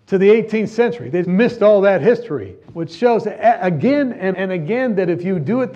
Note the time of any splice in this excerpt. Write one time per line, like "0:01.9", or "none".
0:01.2
0:02.6
0:04.3